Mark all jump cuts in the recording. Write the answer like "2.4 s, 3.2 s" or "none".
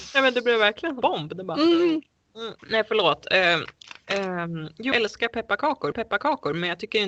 1.0 s, 2.6 s, 4.9 s, 5.9 s